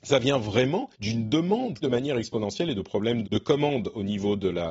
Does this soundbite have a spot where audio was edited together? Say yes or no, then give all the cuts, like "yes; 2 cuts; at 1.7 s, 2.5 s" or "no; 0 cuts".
yes; 3 cuts; at 0.9 s, 1.8 s, 3.2 s